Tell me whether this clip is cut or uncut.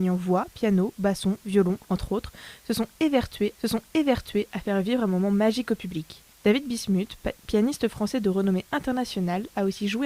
cut